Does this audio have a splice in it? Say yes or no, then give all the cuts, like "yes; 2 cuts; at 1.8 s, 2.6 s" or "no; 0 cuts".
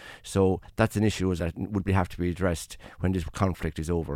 yes; 2 cuts; at 1.4 s, 1.9 s